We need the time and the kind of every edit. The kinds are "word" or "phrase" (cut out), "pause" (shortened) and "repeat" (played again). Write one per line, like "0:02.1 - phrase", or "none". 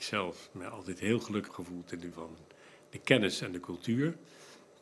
0:01.5 - word
0:02.1 - word